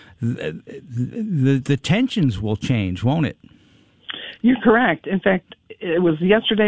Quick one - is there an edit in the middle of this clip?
no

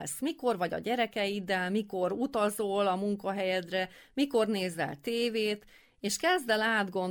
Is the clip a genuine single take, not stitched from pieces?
yes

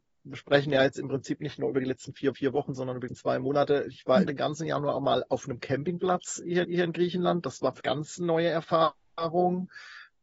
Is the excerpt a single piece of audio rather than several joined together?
no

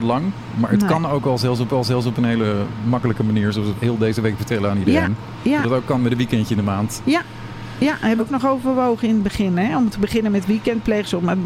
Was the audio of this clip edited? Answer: yes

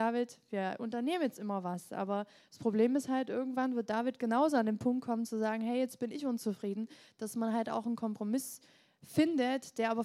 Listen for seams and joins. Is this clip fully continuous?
yes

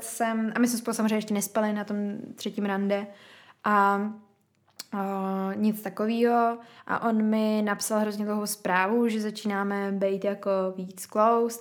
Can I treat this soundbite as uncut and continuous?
yes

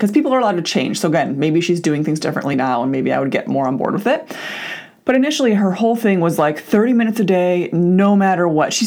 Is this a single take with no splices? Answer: yes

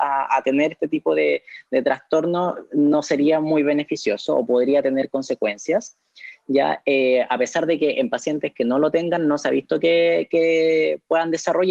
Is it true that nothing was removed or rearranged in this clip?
yes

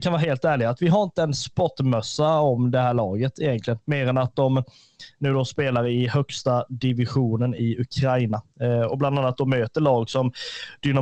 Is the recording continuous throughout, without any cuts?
no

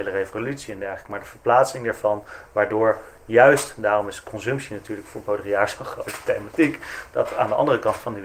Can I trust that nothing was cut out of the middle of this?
yes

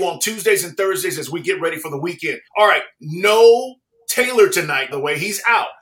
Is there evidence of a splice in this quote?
yes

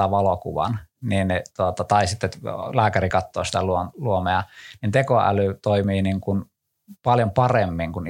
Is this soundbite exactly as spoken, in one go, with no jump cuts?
yes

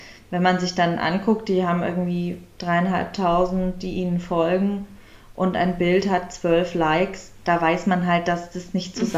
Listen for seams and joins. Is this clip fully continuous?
yes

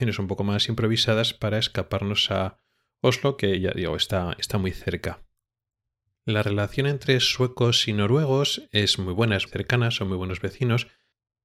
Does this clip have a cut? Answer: yes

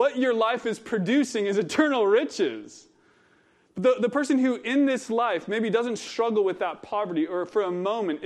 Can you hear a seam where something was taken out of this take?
no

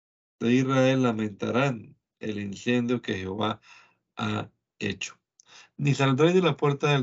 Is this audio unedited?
yes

